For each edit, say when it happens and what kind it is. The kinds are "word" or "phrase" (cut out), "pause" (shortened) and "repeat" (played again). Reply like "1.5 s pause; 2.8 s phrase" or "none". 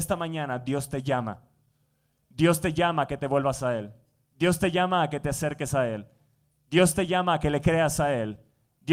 none